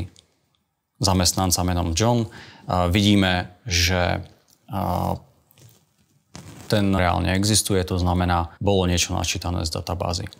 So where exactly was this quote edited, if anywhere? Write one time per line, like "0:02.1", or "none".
0:07.0
0:08.6